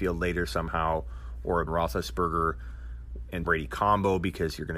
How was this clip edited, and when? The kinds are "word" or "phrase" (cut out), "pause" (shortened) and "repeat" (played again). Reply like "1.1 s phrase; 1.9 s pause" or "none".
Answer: 1.7 s word; 3.4 s word